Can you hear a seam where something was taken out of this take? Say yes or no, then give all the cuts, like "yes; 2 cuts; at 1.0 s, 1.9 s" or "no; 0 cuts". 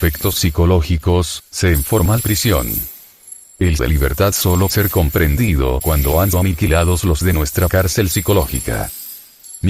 yes; 7 cuts; at 1.7 s, 3.8 s, 4.7 s, 5.8 s, 6.3 s, 7.2 s, 7.7 s